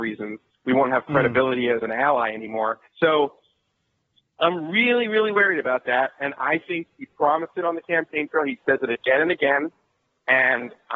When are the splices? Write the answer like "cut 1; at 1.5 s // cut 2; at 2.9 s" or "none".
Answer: cut 1; at 2.9 s